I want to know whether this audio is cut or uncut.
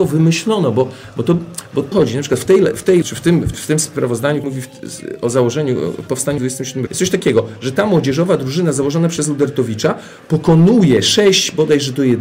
cut